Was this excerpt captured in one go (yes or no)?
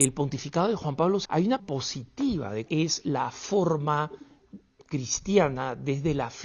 no